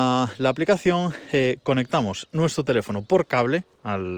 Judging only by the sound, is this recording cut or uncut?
uncut